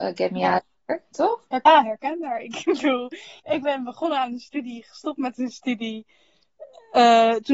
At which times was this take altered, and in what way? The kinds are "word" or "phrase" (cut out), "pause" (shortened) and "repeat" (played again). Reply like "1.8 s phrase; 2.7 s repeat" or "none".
1.7 s word; 3.4 s pause